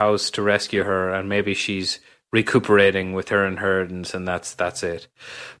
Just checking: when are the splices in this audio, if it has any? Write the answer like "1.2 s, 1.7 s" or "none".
none